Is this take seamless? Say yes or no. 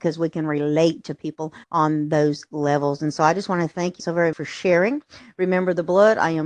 no